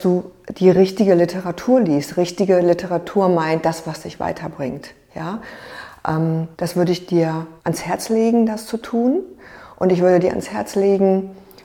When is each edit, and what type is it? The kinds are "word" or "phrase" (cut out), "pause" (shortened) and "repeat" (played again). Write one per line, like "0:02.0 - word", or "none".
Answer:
0:06.5 - pause
0:07.6 - pause

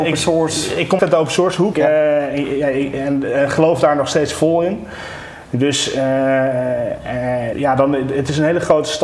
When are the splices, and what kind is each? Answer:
0:01.0 - word
0:01.7 - word
0:07.5 - word

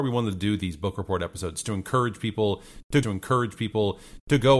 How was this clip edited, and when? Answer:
0:01.6 - phrase
0:03.0 - repeat

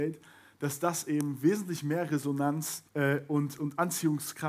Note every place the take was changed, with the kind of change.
0:02.9 - pause

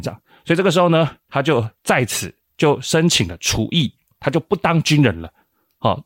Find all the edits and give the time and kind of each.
0:01.8 - pause

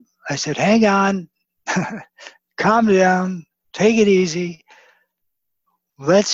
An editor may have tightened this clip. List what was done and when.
none

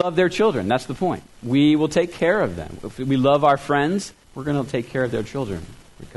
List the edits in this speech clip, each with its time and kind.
0:04.2 - pause

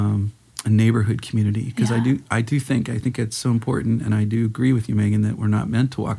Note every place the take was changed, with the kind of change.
none

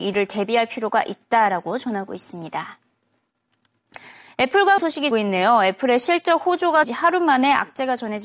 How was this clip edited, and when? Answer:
0:04.8 - word
0:05.1 - word
0:06.8 - word

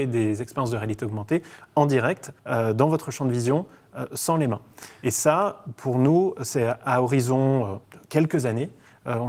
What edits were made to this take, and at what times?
0:02.4 - pause
0:07.8 - pause

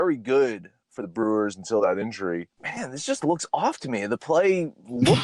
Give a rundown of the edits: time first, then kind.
0:02.5 - pause

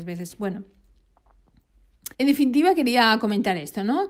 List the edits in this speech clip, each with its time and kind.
0:02.1 - pause

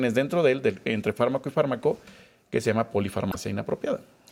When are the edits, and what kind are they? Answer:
none

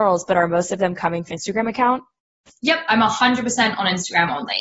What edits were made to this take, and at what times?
0:01.3 - word

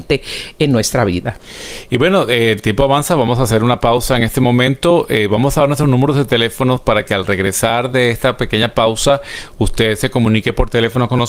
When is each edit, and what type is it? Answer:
none

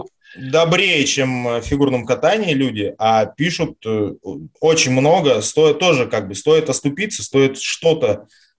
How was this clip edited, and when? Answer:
0:04.6 - pause

